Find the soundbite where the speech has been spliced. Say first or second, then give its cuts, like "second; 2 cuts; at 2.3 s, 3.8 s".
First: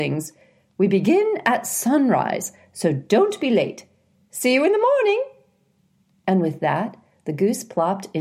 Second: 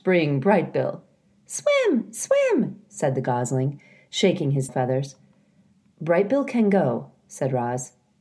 second; 1 cut; at 4.7 s